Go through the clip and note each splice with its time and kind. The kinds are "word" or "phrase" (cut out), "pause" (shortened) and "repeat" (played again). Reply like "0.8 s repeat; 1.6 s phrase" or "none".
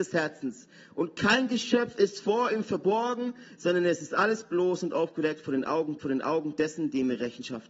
6.0 s repeat